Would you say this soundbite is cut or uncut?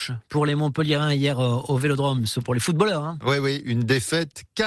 uncut